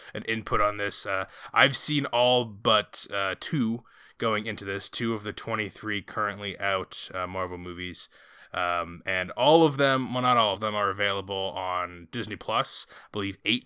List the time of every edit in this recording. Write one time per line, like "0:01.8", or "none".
0:10.5